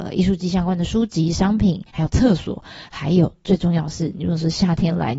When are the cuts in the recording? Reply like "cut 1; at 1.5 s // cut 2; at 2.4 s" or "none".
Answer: cut 1; at 1.9 s